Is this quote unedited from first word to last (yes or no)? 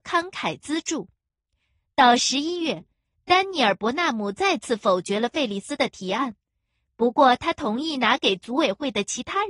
yes